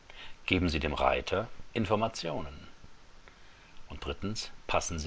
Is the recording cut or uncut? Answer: uncut